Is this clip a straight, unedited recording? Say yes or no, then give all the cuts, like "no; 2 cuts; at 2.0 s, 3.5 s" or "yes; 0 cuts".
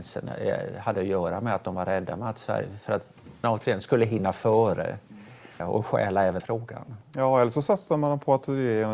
no; 3 cuts; at 3.4 s, 5.6 s, 6.4 s